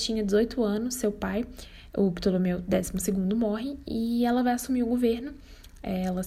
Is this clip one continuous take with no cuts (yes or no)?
yes